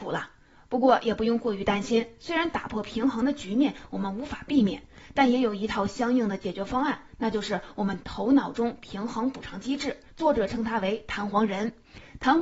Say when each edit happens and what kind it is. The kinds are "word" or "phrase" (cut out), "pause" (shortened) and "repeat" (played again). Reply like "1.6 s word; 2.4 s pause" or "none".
10.1 s pause

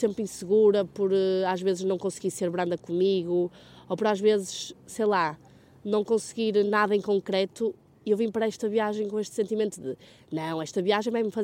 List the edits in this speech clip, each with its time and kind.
none

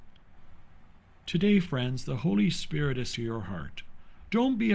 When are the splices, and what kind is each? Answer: 3.1 s word

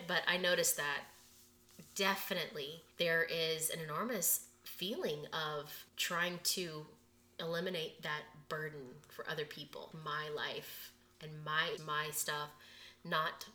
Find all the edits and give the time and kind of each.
2.9 s pause; 5.9 s pause; 9.9 s word; 11.8 s word

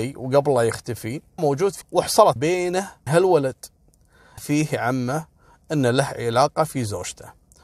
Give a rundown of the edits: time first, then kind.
1.4 s word; 1.8 s word; 2.4 s word; 3.1 s word; 4.4 s word

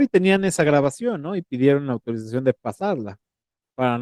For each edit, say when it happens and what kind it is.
none

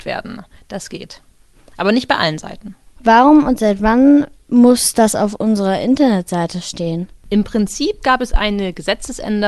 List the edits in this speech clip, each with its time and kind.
none

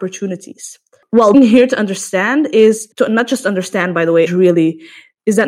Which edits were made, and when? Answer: 1.3 s phrase; 2.9 s pause; 4.3 s word

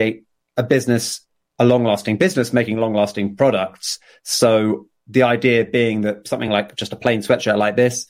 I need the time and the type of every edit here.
none

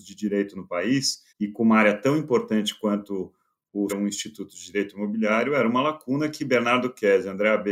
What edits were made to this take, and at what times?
1.3 s pause; 3.9 s phrase

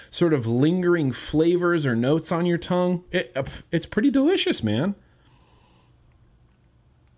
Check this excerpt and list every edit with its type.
none

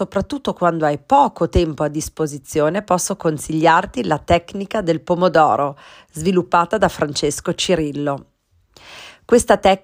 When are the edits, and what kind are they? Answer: none

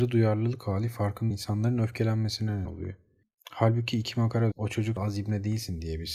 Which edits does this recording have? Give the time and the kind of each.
1.3 s word; 2.6 s word; 4.5 s word; 5.0 s word

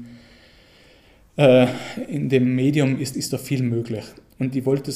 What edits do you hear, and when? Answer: 3.1 s word

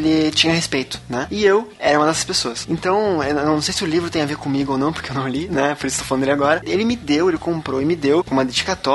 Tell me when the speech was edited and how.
none

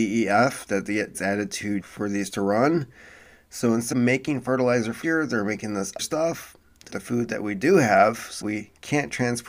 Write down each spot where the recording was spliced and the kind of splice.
1.1 s word; 1.8 s word; 2.3 s word; 3.9 s word; 5.0 s word; 6.0 s word; 6.9 s word; 8.4 s word

